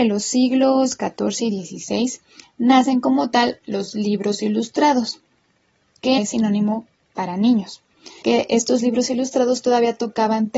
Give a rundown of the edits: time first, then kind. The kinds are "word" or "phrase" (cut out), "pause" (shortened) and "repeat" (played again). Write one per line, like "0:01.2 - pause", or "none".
0:06.2 - word
0:08.2 - word